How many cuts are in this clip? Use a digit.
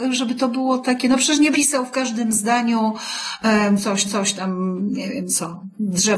2